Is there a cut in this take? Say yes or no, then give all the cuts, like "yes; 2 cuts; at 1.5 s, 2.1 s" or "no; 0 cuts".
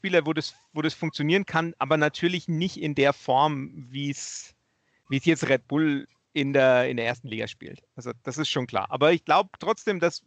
no; 0 cuts